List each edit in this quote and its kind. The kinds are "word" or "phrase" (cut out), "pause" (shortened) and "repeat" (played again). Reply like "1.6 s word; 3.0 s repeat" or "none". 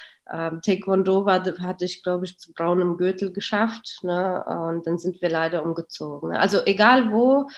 2.4 s word